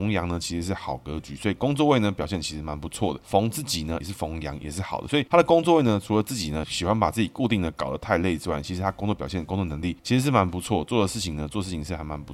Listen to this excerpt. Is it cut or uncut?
cut